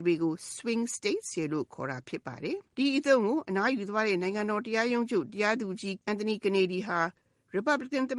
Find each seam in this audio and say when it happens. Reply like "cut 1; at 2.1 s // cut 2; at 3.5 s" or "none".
cut 1; at 2.7 s

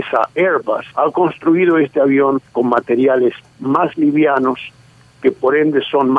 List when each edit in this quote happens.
cut 1; at 0.9 s // cut 2; at 2.5 s

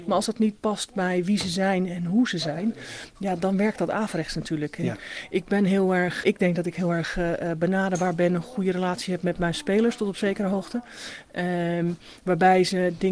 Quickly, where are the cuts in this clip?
cut 1; at 6.2 s

